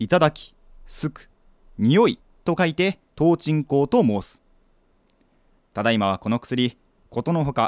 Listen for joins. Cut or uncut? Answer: cut